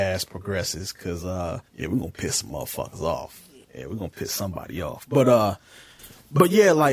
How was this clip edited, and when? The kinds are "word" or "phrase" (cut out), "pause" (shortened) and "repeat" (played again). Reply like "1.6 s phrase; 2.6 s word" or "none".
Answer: 1.7 s pause; 3.6 s pause